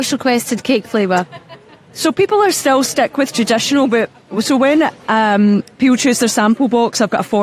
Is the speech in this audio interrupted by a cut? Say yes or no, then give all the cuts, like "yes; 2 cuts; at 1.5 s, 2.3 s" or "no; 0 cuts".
no; 0 cuts